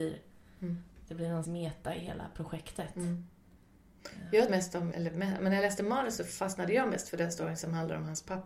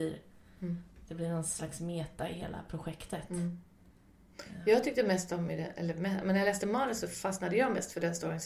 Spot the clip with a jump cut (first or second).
first